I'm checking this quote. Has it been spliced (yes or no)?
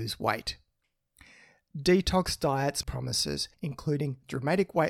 yes